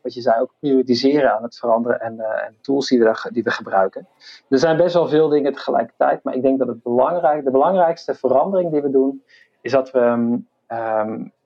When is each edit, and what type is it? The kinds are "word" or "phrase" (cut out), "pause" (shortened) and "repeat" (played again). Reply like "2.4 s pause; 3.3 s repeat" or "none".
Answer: none